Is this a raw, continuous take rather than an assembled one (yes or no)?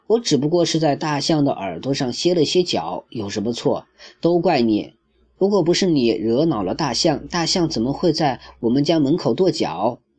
yes